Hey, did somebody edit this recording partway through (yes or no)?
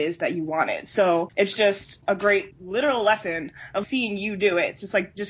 yes